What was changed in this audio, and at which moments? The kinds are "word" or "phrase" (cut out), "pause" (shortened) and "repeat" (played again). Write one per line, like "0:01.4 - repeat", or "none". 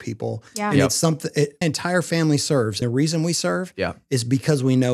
0:01.6 - word
0:02.8 - word